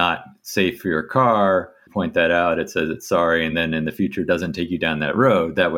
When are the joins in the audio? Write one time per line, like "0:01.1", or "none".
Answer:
none